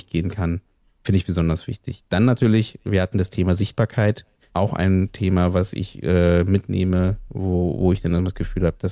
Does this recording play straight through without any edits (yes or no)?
yes